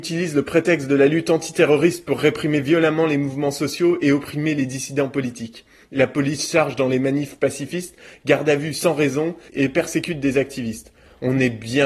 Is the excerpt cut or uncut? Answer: uncut